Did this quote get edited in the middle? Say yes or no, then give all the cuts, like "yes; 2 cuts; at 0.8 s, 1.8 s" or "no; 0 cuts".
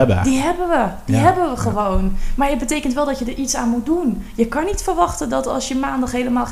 no; 0 cuts